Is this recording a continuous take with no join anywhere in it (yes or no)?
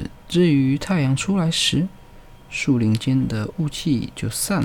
yes